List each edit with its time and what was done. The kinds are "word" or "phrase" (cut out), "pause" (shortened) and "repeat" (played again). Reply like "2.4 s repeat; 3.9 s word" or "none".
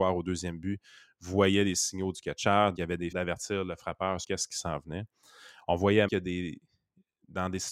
2.8 s word; 3.1 s word; 4.2 s word; 6.1 s word